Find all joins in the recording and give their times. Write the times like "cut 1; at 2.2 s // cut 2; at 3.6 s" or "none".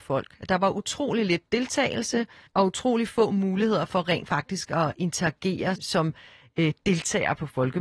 cut 1; at 2.5 s // cut 2; at 5.8 s